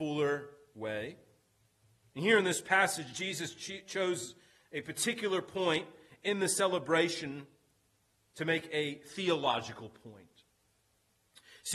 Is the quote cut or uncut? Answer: uncut